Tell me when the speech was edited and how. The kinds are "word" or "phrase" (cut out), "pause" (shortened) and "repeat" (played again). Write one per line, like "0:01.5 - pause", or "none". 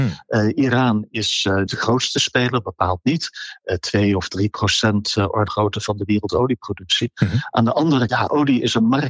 0:01.7 - word
0:05.5 - word
0:08.1 - word